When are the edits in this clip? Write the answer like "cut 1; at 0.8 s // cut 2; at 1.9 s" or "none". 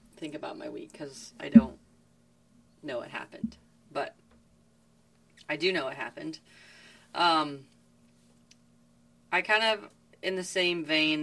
none